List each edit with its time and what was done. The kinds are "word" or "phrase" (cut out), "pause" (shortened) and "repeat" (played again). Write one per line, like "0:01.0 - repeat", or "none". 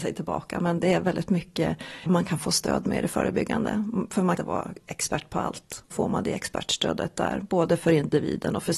0:02.1 - word
0:04.4 - phrase
0:05.9 - word